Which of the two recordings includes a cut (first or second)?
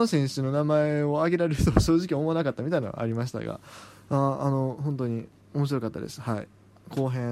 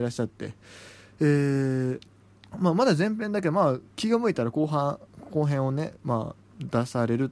second